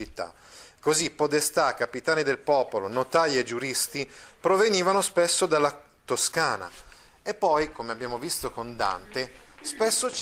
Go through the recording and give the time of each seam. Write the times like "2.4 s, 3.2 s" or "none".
none